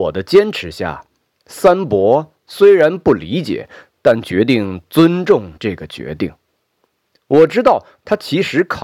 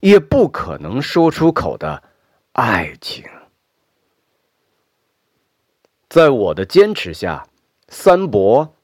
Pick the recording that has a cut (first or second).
first